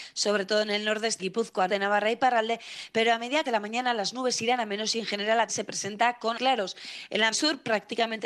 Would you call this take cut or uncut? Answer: cut